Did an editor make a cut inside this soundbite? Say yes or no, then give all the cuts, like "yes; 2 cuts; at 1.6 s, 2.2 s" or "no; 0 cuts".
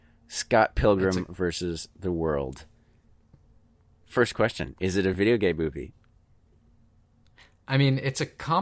no; 0 cuts